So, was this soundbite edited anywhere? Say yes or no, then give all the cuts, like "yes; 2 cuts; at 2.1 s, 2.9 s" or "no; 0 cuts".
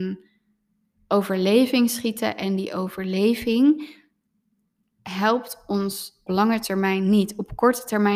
yes; 1 cut; at 6.3 s